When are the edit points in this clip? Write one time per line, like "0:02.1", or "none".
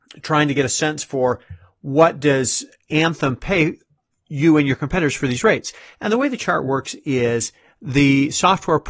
none

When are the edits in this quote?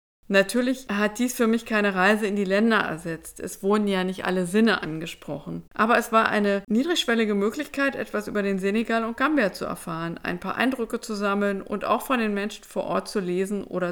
0:05.7

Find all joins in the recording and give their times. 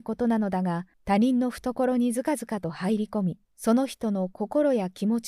0:00.9
0:03.5

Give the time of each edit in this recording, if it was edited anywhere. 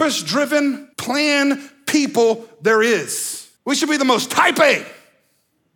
0:00.9
0:03.6

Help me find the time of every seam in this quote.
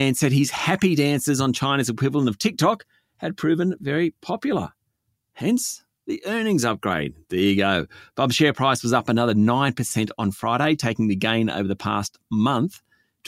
none

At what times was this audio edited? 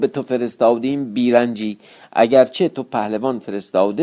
none

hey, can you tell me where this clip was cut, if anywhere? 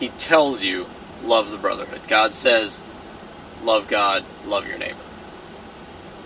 none

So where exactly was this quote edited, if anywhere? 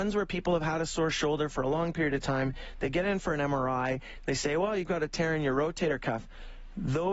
none

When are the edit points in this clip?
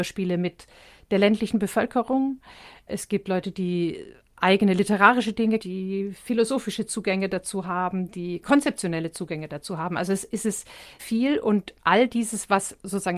0:05.6
0:11.0

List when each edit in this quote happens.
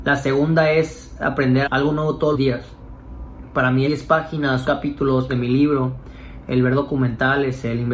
0:01.6
0:02.3
0:03.8
0:04.6
0:05.3

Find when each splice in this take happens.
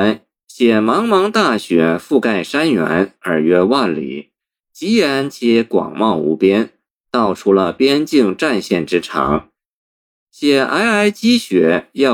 none

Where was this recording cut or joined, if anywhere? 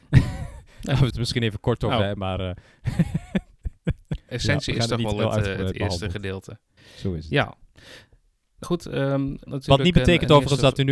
0:01.1
0:02.2
0:04.3
0:06.8
0:08.6
0:09.5

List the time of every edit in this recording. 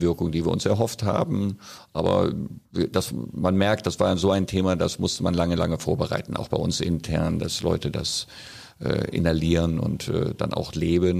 0:02.7

